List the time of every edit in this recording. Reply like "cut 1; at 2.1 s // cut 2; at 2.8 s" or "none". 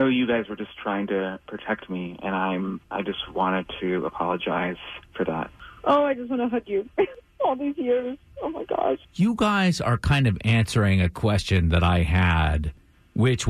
cut 1; at 2.8 s // cut 2; at 5.1 s // cut 3; at 9.0 s